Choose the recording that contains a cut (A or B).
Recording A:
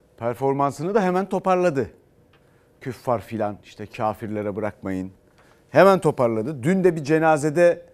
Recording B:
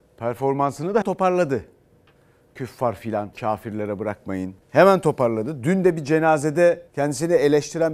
B